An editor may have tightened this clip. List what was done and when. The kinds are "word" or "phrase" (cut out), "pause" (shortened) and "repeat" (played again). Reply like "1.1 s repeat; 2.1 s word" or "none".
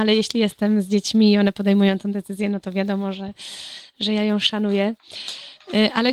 none